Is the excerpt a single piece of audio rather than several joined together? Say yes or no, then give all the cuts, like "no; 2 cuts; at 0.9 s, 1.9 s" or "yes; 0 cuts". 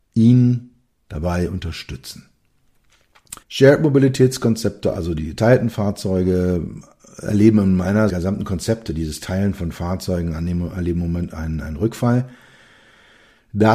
no; 2 cuts; at 3.4 s, 8.1 s